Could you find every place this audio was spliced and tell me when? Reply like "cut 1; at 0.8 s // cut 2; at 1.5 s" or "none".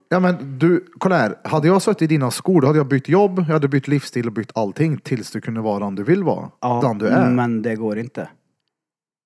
cut 1; at 6.8 s